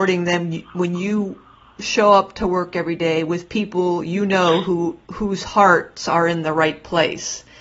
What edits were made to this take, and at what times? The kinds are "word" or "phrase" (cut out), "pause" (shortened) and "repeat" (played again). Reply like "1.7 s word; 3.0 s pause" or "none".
5.0 s pause